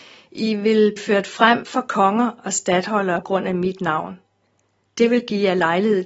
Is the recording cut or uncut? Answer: cut